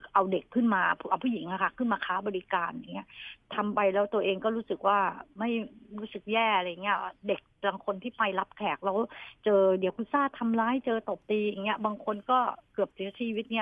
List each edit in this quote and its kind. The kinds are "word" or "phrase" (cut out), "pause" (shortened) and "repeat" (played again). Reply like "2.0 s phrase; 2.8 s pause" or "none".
none